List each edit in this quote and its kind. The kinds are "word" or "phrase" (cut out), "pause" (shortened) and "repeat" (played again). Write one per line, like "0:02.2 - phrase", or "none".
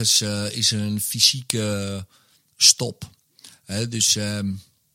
none